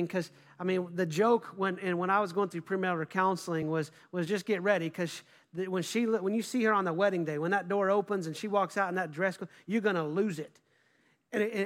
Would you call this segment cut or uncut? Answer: uncut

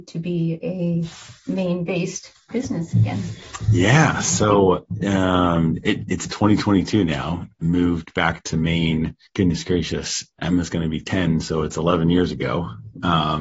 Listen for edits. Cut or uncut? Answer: cut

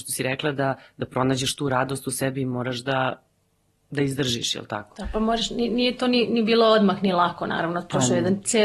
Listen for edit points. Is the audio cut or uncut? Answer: uncut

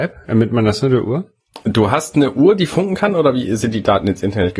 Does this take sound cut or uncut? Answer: uncut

